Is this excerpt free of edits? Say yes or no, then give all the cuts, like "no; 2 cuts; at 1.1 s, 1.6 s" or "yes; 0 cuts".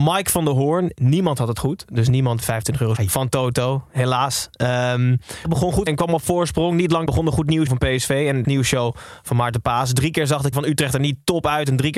no; 8 cuts; at 2.4 s, 3.0 s, 5.4 s, 5.9 s, 7.1 s, 7.7 s, 8.4 s, 10.5 s